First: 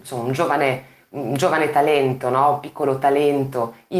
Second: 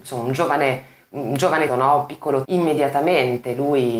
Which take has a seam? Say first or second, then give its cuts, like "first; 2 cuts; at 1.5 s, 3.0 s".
second; 2 cuts; at 1.7 s, 2.4 s